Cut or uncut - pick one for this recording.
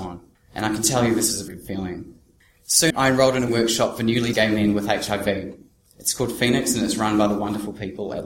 cut